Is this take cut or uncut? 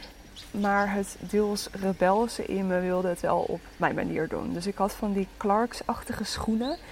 uncut